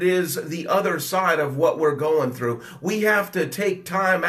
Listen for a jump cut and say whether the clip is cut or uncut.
uncut